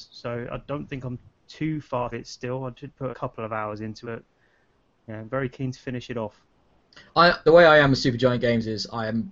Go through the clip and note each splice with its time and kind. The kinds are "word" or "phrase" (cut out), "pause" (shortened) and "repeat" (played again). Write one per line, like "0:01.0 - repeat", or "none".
0:01.3 - pause
0:02.1 - word
0:03.1 - word
0:04.0 - word
0:07.5 - phrase